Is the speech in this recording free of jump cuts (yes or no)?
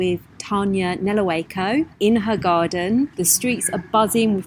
no